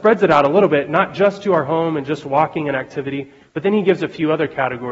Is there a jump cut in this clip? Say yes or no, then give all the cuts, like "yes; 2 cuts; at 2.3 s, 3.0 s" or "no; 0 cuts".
no; 0 cuts